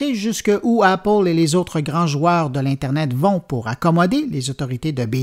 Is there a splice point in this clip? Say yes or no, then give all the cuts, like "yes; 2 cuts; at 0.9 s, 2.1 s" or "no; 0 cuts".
no; 0 cuts